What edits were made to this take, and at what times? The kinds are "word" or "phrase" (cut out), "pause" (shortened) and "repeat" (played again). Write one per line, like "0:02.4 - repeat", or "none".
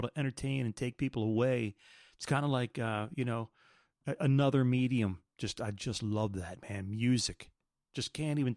none